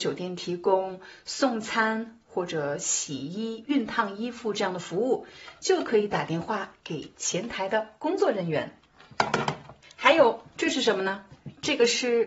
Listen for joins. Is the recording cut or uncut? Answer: cut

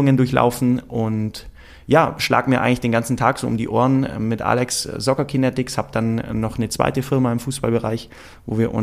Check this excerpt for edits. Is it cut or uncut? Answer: uncut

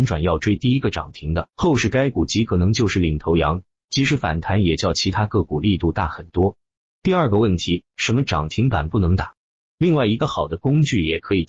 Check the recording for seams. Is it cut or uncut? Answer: uncut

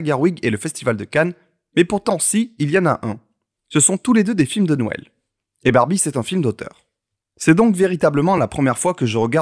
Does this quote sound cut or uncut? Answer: uncut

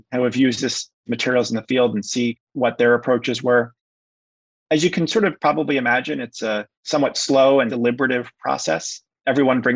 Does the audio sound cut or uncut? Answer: uncut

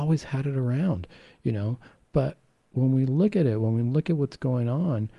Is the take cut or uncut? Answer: uncut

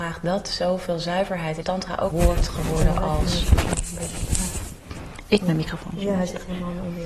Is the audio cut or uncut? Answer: cut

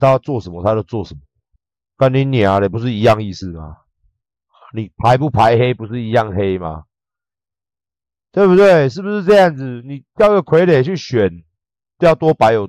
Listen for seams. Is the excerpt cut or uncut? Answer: cut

